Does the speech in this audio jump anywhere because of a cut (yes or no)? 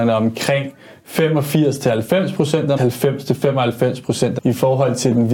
yes